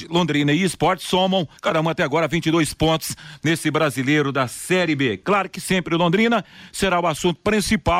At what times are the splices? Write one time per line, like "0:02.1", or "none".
0:01.6

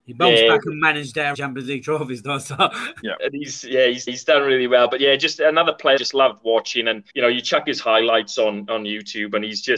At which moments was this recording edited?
0:01.3
0:03.0
0:04.1
0:06.0
0:07.1

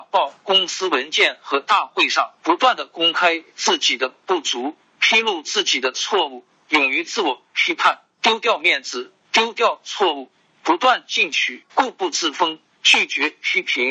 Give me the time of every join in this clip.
0:02.4
0:11.7

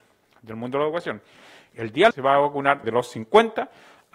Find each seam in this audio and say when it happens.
0:02.1
0:02.8

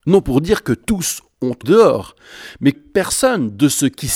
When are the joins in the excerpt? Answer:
0:01.6
0:02.7

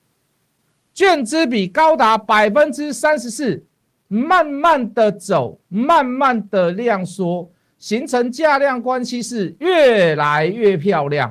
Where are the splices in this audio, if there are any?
none

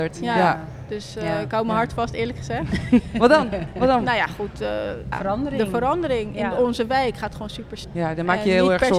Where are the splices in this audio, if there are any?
0:05.1
0:07.8

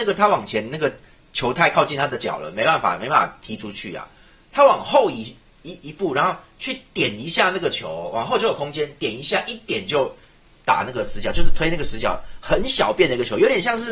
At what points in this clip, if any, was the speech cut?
none

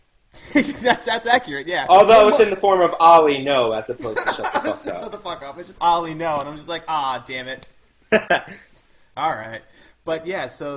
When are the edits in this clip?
0:05.7

